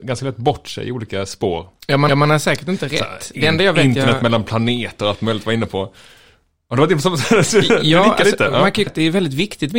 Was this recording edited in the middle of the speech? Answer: yes; 2 cuts; at 2.1 s, 8.9 s

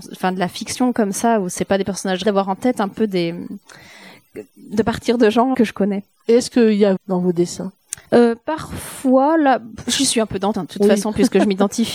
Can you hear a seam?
yes; 5 cuts; at 2.2 s, 5.5 s, 7.0 s, 8.0 s, 10.5 s

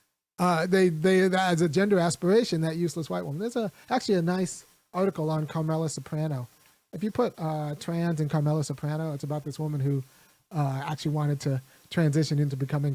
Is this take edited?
no; 0 cuts

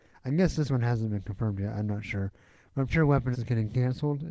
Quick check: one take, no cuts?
no; 2 cuts; at 2.9 s, 3.3 s

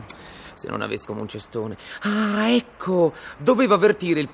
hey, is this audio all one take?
no; 1 cut; at 1.0 s

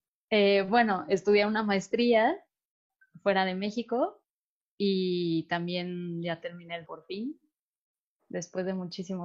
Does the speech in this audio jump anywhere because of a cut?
yes; 1 cut; at 6.8 s

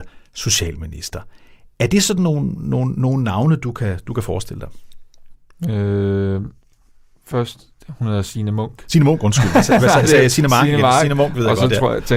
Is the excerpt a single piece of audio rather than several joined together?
yes; 0 cuts

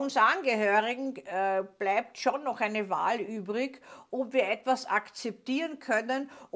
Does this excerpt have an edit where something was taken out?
no; 0 cuts

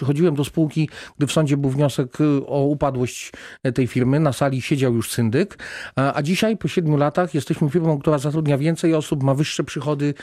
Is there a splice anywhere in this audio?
no; 0 cuts

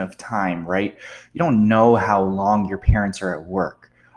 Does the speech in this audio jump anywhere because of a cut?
no; 0 cuts

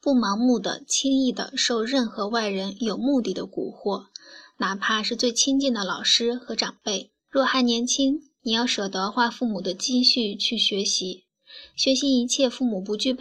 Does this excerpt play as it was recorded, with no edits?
no; 1 cut; at 7.2 s

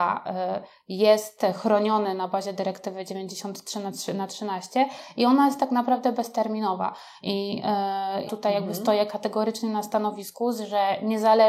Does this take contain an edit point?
yes; 1 cut; at 8.3 s

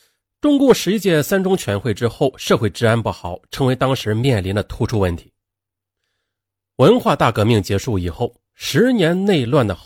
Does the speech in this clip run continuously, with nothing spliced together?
yes; 0 cuts

